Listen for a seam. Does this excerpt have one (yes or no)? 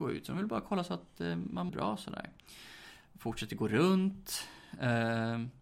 yes